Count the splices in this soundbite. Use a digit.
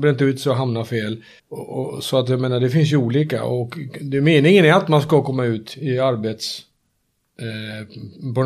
1